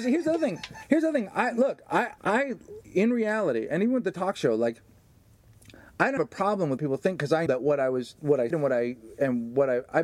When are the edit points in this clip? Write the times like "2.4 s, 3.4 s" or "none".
2.2 s, 2.8 s, 6.2 s, 6.8 s, 7.5 s, 8.5 s